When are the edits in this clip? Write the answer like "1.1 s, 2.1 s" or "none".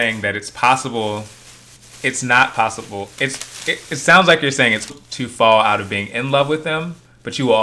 1.8 s, 3.1 s, 4.9 s